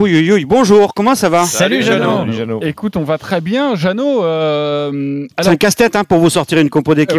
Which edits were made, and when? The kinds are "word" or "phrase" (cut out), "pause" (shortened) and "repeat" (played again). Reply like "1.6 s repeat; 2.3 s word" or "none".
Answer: none